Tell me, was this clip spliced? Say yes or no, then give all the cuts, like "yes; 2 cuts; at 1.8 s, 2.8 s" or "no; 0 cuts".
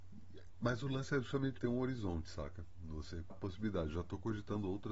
yes; 2 cuts; at 1.6 s, 3.3 s